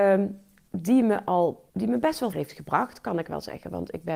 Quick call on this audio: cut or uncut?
cut